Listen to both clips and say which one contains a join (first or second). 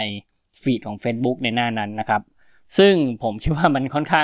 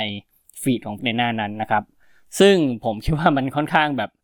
second